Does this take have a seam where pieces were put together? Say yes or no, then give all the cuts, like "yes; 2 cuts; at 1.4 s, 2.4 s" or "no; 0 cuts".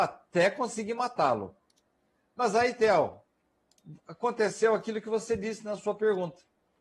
no; 0 cuts